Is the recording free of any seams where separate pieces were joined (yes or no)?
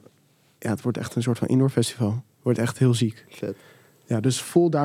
yes